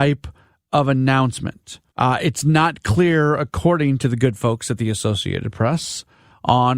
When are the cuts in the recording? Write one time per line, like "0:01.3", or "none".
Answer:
0:01.9